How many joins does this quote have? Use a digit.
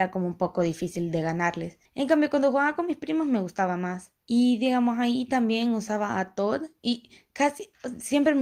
2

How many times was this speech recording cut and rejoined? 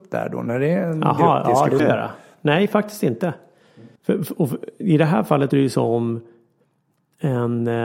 3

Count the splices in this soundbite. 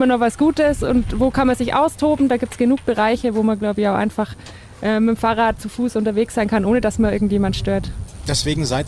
0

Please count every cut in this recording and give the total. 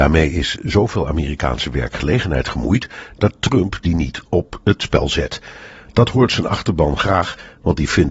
0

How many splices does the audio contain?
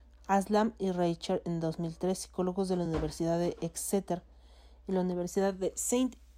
0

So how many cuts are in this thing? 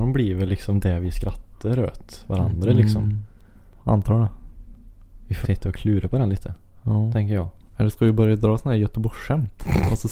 1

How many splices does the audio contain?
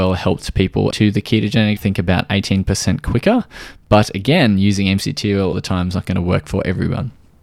3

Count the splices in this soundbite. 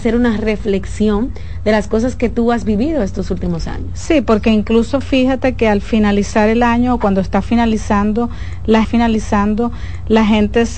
1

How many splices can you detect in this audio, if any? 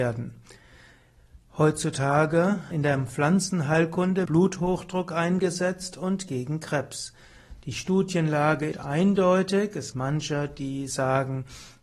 4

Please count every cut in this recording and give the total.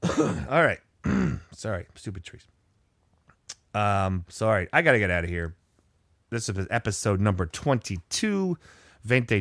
1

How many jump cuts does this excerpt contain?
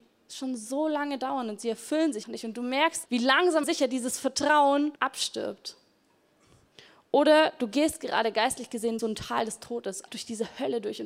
6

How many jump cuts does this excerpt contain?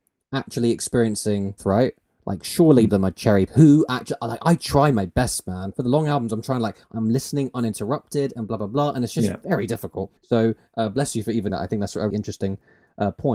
6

